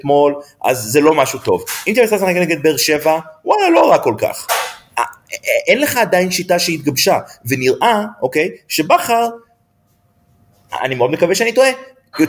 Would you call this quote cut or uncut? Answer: uncut